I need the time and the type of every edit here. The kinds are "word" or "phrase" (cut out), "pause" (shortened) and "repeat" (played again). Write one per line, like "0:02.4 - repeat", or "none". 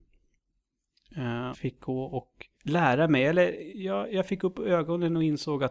0:01.5 - word
0:02.5 - pause
0:03.7 - word